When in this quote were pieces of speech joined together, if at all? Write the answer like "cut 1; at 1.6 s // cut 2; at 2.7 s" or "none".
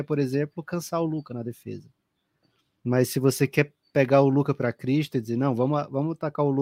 none